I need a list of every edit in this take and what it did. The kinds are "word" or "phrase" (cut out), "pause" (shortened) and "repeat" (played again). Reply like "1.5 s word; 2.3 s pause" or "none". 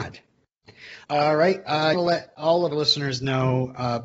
1.0 s pause; 1.9 s phrase; 2.7 s word